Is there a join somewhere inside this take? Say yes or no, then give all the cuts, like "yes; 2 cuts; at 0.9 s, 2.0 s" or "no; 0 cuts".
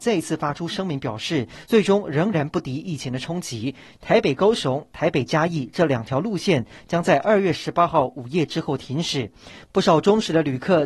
no; 0 cuts